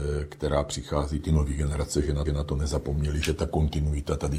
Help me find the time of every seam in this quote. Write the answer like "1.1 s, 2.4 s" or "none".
2.3 s